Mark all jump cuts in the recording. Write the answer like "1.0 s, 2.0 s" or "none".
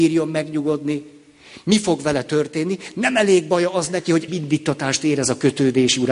4.3 s

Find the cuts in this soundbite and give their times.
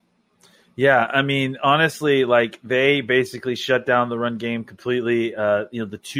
none

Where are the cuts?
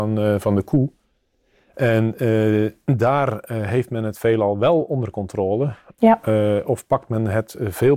none

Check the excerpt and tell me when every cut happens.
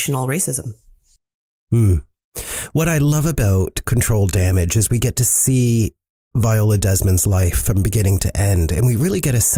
none

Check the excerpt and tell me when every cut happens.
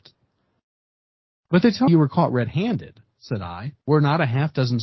1.9 s, 3.8 s

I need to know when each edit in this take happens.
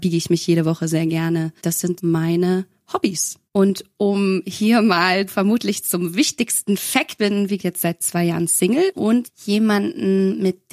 1.6 s, 2.0 s, 3.5 s, 5.3 s, 7.2 s, 7.6 s, 9.2 s

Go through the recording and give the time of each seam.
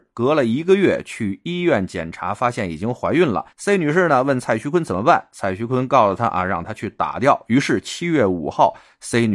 3.5 s

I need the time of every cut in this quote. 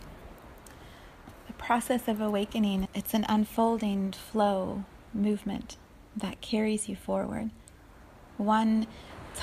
2.9 s

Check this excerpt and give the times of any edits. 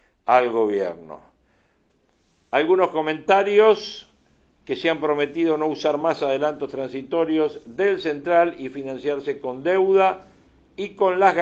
none

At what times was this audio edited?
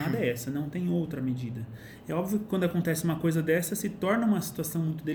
none

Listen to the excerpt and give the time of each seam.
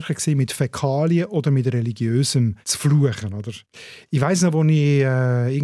2.6 s

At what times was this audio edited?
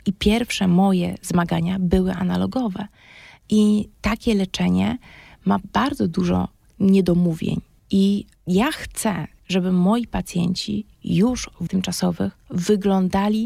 11.7 s

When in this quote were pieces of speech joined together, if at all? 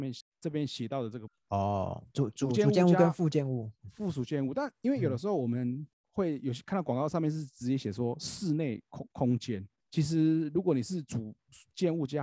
3.8 s, 9.8 s

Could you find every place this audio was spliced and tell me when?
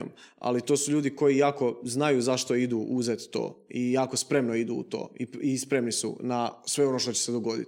none

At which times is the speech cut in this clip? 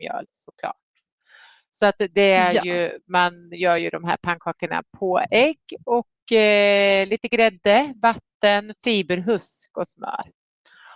none

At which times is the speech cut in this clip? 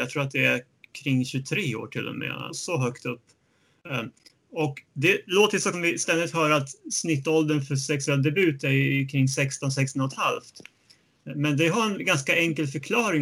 2.5 s, 5.7 s

